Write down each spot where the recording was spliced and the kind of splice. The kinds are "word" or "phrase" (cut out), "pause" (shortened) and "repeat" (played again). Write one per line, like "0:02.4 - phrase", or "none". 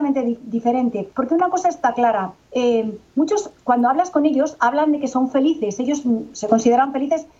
0:01.1 - pause
0:02.4 - pause